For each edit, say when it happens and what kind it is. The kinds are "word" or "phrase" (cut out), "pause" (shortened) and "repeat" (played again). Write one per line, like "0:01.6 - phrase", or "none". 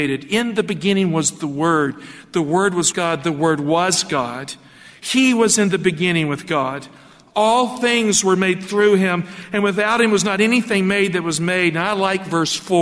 0:02.9 - word